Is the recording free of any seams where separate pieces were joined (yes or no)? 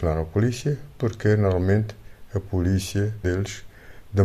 no